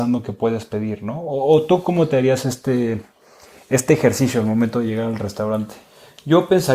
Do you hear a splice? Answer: no; 0 cuts

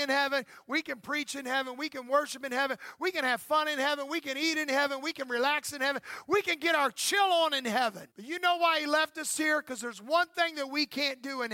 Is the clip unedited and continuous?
no; 1 cut; at 8.1 s

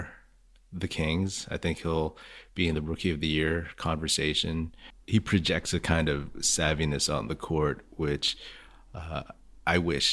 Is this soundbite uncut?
yes; 0 cuts

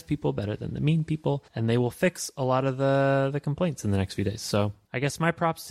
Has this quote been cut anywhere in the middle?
yes; 1 cut; at 1.5 s

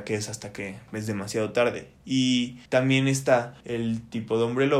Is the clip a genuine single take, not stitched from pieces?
no; 2 cuts; at 2.7 s, 3.6 s

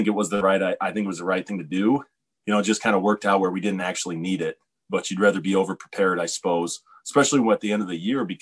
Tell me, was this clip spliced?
no; 0 cuts

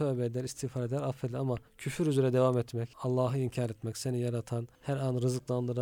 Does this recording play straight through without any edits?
no; 3 cuts; at 1.7 s, 2.9 s, 4.7 s

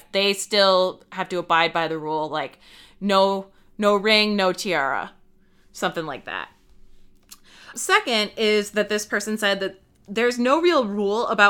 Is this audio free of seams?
no; 1 cut; at 7.7 s

